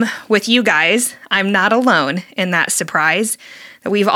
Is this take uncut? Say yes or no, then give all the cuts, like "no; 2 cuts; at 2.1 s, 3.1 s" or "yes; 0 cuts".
yes; 0 cuts